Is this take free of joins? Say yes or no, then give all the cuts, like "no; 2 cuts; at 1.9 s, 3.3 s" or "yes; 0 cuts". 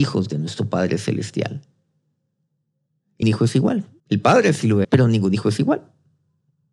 no; 3 cuts; at 3.2 s, 4.0 s, 4.8 s